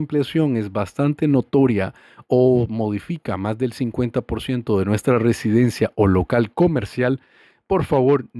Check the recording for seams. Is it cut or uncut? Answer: uncut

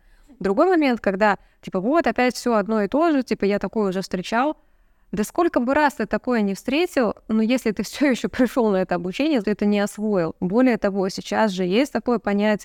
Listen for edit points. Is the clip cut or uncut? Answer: cut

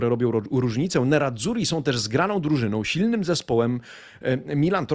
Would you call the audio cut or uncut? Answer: uncut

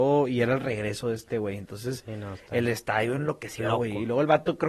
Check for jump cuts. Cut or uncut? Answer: uncut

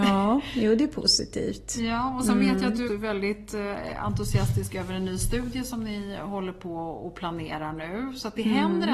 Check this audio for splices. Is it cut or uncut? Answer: cut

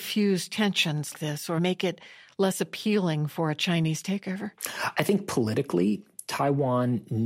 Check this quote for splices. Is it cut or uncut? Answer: cut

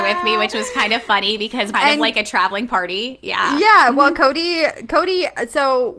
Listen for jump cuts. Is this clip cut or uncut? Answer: cut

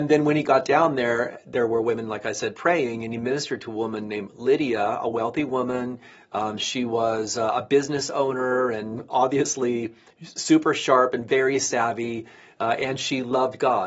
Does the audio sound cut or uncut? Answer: uncut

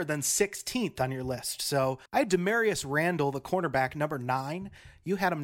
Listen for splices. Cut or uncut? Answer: cut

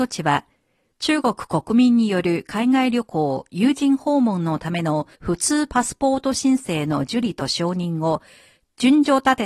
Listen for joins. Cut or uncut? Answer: cut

